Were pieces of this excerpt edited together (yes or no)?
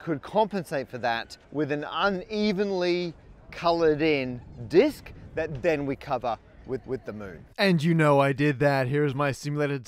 yes